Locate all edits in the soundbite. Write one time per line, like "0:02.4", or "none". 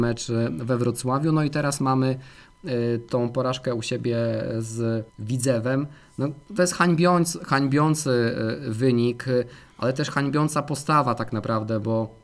0:05.1
0:06.4